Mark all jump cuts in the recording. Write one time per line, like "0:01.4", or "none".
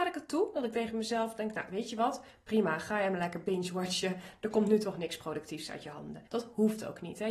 0:06.3